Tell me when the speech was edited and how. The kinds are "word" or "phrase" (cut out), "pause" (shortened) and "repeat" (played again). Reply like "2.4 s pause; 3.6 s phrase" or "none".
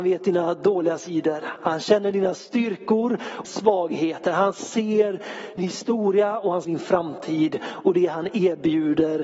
3.4 s word; 5.6 s word; 6.6 s word

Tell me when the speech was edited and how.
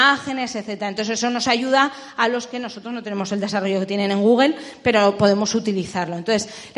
none

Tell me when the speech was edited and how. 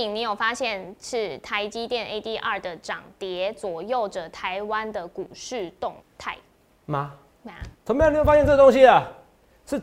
6.0 s pause; 7.7 s pause

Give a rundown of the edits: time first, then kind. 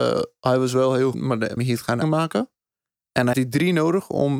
1.1 s word; 1.6 s word; 2.0 s word; 3.3 s word

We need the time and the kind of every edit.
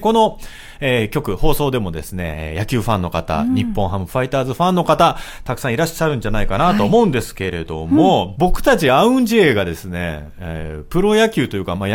8.4 s phrase

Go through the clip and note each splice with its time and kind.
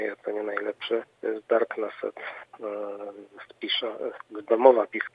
1.1 s pause

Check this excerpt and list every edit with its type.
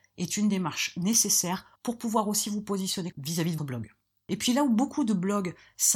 1.7 s pause; 3.1 s word; 3.6 s word

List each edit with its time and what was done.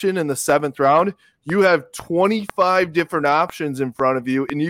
none

